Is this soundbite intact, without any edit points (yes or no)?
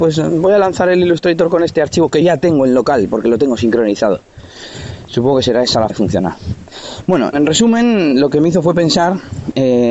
no